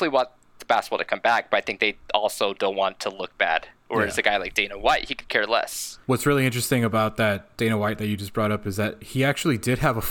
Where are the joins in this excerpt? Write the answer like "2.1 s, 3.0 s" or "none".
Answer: 6.0 s